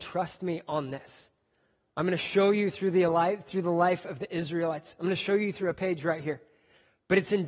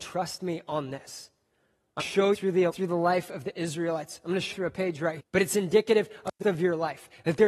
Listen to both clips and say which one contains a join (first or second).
second